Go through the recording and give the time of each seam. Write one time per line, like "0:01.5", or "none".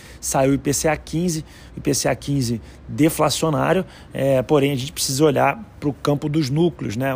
none